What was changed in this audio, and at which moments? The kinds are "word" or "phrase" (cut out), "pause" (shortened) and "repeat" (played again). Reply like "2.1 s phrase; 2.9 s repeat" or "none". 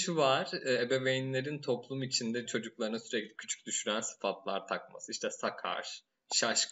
none